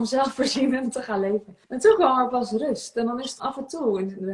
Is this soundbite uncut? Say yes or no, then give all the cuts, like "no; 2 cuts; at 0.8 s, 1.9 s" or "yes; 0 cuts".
no; 2 cuts; at 1.6 s, 3.4 s